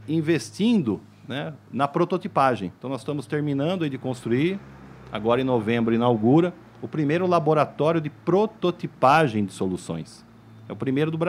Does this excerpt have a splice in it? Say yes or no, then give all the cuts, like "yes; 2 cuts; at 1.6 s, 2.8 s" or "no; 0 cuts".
no; 0 cuts